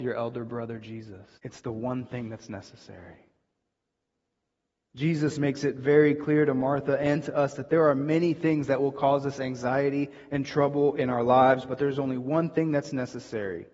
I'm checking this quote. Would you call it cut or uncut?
cut